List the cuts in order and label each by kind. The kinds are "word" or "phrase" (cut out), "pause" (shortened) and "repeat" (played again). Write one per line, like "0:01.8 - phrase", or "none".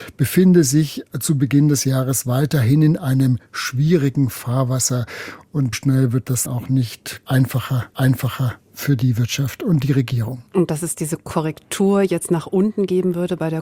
0:05.7 - word
0:06.5 - word
0:07.9 - repeat
0:10.5 - pause